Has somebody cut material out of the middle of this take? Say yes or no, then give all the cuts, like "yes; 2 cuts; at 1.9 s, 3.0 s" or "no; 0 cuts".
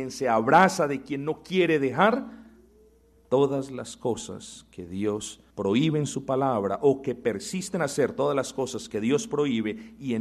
yes; 1 cut; at 5.5 s